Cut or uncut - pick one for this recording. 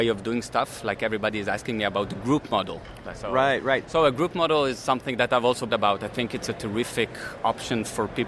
cut